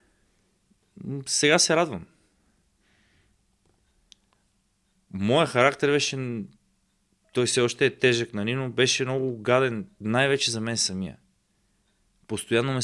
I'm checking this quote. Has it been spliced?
no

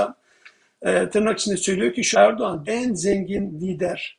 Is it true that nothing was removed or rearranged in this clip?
no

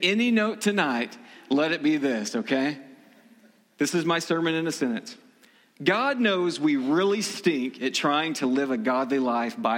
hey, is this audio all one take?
yes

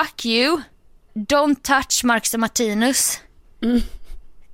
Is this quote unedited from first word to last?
yes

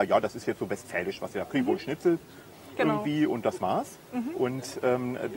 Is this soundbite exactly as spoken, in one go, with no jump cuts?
yes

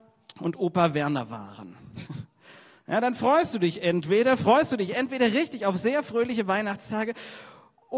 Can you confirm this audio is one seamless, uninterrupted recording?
yes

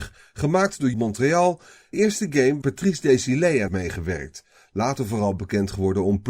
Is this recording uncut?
no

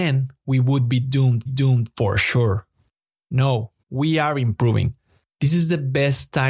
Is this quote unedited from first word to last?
no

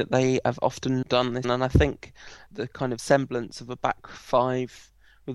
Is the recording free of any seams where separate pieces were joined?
no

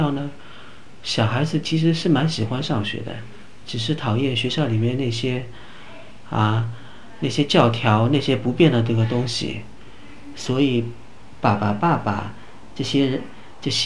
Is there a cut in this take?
no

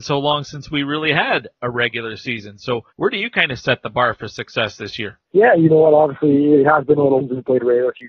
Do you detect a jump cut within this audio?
yes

